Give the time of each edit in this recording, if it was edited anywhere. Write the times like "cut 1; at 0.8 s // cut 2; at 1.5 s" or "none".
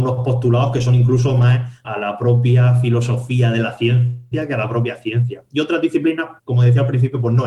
cut 1; at 1.8 s // cut 2; at 6.4 s

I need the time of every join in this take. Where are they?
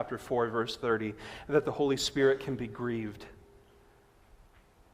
none

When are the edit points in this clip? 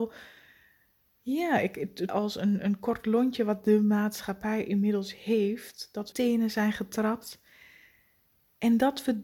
cut 1; at 2.1 s // cut 2; at 6.1 s

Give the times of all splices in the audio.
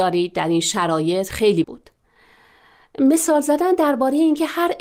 cut 1; at 1.6 s

